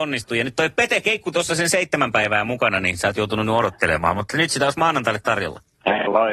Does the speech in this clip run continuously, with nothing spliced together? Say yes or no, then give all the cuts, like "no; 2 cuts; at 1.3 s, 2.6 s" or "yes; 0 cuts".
yes; 0 cuts